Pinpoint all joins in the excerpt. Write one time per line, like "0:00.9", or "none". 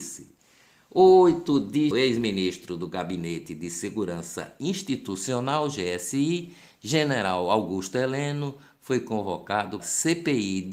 0:01.9
0:09.8